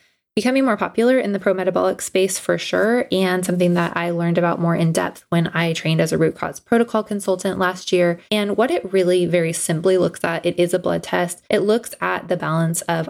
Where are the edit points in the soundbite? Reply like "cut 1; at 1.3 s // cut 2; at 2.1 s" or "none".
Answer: cut 1; at 8.3 s // cut 2; at 11.5 s